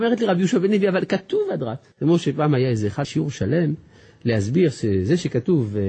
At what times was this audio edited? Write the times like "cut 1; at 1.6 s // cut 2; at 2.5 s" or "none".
cut 1; at 1.9 s // cut 2; at 3.0 s